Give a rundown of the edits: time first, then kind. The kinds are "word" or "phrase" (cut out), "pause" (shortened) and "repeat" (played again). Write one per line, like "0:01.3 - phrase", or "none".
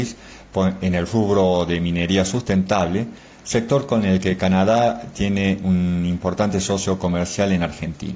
none